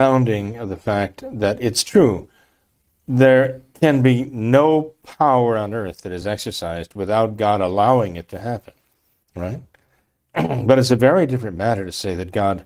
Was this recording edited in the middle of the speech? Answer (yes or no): no